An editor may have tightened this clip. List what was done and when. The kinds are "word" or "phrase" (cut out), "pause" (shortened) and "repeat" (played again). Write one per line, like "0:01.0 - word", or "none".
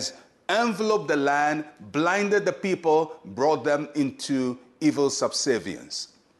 none